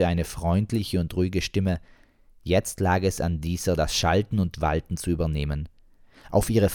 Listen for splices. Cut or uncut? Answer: uncut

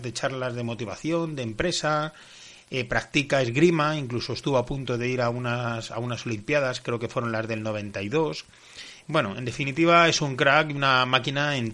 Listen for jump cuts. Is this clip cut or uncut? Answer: uncut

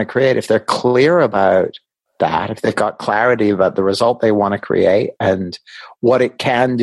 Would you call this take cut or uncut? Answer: uncut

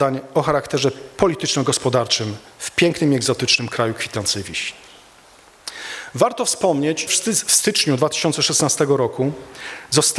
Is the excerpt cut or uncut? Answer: cut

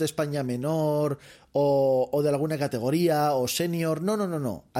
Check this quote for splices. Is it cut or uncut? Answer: uncut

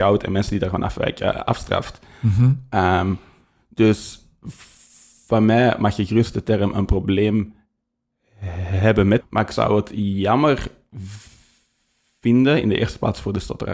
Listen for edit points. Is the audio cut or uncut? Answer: cut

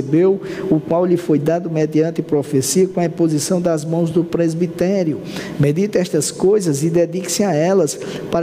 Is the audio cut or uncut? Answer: uncut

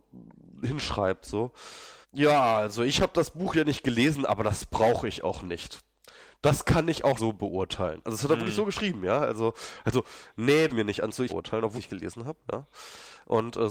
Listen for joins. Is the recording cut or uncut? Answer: cut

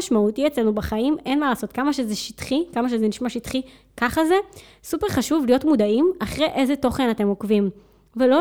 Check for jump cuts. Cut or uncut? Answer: uncut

